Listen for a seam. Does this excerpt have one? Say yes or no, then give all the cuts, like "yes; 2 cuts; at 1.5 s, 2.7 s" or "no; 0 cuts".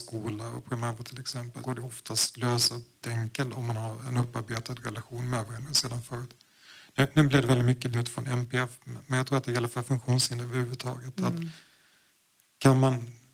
yes; 3 cuts; at 1.6 s, 3.0 s, 7.9 s